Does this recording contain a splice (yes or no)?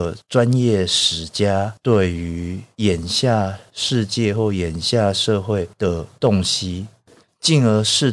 no